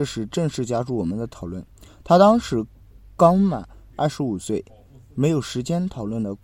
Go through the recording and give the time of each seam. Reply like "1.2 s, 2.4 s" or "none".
none

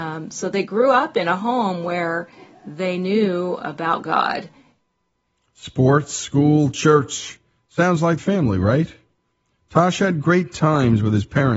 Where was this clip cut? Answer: 8.2 s

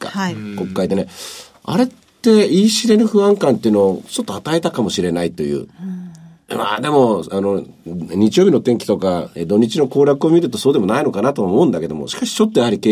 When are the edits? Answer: none

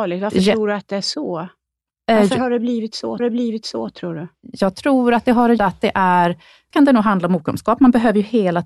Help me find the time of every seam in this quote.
3.2 s, 5.6 s, 6.7 s

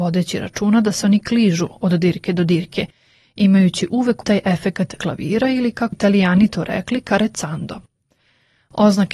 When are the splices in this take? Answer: 4.2 s, 5.0 s, 5.9 s

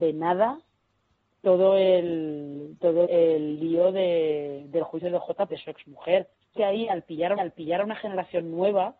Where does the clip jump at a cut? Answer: 3.1 s, 5.5 s, 6.6 s, 7.4 s

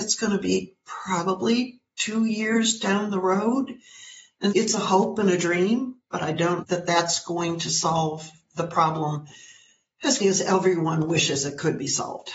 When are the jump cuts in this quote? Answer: 4.5 s, 6.6 s, 10.2 s

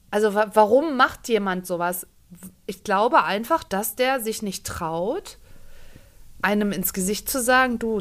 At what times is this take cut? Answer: none

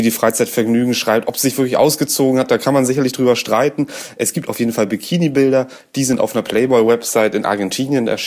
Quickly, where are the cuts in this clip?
none

